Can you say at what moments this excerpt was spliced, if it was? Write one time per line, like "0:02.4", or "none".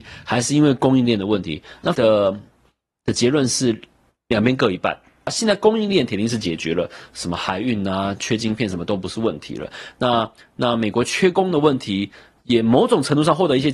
0:01.9